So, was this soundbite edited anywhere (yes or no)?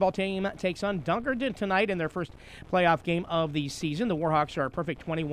no